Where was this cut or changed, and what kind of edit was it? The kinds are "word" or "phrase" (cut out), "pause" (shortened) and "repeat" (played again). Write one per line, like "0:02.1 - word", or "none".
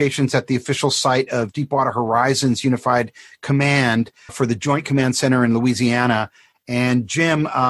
0:04.3 - word